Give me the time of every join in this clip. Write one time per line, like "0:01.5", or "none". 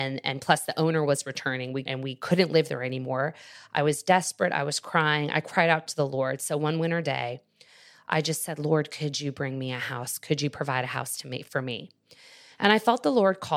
0:01.8